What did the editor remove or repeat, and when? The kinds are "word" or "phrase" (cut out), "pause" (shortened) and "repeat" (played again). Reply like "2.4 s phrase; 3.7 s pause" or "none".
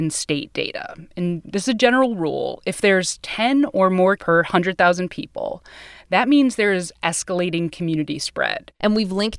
4.2 s word